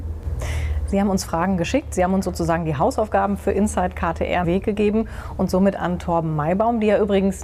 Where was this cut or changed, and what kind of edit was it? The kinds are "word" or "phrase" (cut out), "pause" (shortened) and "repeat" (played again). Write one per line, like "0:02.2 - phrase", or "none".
0:04.4 - phrase
0:05.8 - phrase